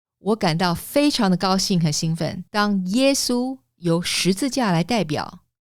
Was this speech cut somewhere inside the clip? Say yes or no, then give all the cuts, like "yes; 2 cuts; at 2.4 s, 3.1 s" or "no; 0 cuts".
yes; 1 cut; at 2.5 s